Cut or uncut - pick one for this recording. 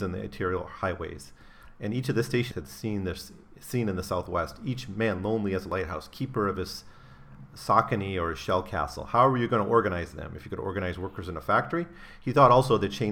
cut